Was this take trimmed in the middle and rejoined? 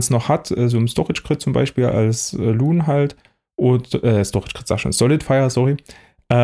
no; 0 cuts

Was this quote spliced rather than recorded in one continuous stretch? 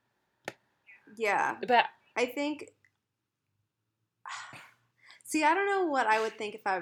no; 0 cuts

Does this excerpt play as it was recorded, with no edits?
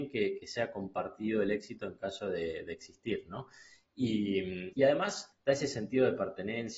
yes; 0 cuts

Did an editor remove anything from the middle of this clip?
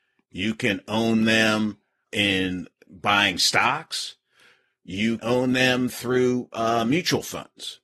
yes; 2 cuts; at 2.1 s, 5.2 s

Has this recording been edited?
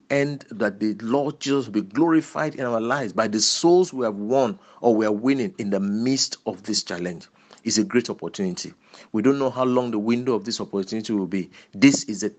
no; 0 cuts

